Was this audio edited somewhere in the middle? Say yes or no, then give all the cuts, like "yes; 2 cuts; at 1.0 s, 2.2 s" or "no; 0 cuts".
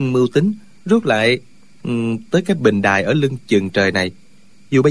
no; 0 cuts